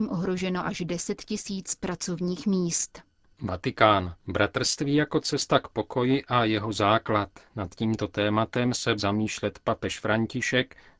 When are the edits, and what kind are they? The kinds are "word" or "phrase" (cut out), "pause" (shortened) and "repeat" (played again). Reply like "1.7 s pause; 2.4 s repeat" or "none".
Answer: 4.2 s pause; 7.5 s pause; 9.0 s word